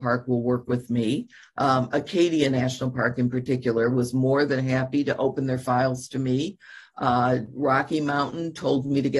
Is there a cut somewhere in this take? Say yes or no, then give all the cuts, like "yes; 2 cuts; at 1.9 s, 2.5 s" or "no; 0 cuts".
no; 0 cuts